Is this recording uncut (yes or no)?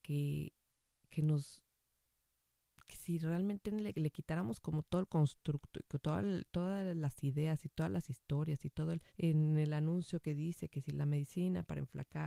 no